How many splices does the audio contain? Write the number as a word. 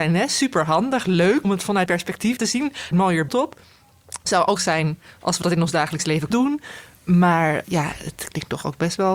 eight